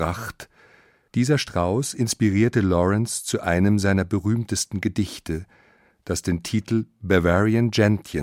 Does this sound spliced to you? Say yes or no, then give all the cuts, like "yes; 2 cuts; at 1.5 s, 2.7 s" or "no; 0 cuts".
no; 0 cuts